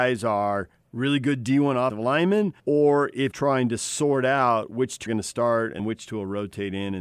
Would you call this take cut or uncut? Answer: cut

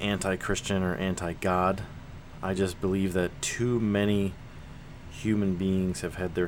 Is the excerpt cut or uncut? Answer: uncut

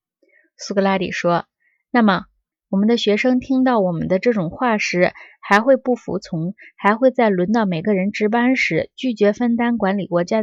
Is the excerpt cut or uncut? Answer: uncut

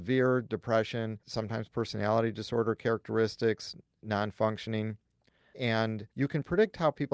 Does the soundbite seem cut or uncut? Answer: cut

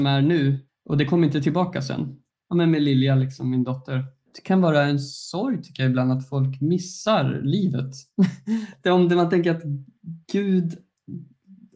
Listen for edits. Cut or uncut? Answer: uncut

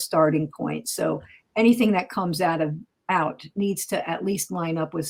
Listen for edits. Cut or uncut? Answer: uncut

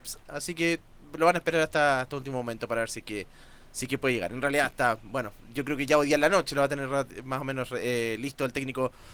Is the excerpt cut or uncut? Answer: uncut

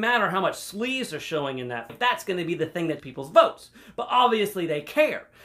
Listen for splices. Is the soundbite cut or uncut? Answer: cut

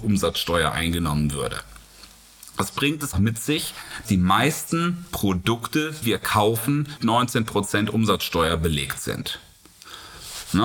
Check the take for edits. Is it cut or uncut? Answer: cut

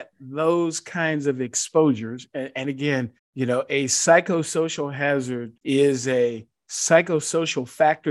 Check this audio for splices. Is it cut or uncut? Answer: cut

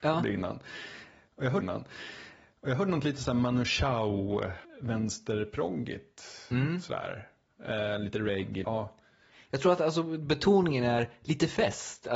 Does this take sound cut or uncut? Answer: cut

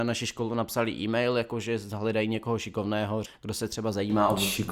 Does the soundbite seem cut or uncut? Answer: cut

